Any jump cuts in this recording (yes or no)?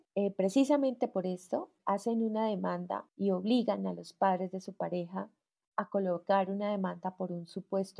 no